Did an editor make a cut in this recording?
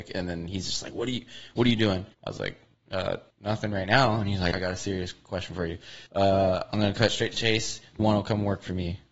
yes; 6 cuts; at 2.1 s, 3.3 s, 4.5 s, 6.1 s, 7.3 s, 8.0 s

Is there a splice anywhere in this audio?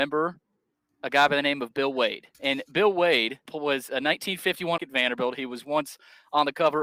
yes; 3 cuts; at 2.3 s, 3.5 s, 4.8 s

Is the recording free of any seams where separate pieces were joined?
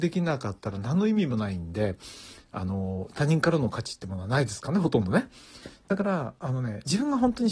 yes; 0 cuts

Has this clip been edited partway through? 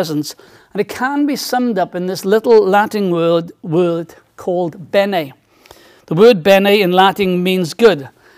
no; 0 cuts

